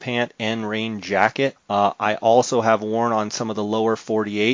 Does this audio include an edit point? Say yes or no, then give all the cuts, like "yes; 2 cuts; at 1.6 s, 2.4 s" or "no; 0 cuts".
no; 0 cuts